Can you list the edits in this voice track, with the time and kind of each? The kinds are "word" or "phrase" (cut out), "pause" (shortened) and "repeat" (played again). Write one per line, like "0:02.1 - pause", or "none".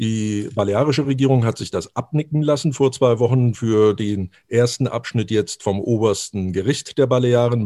none